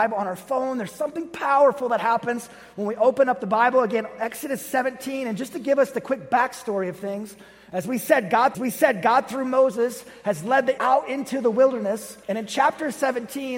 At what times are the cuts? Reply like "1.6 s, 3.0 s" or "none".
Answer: 8.5 s, 10.8 s, 12.2 s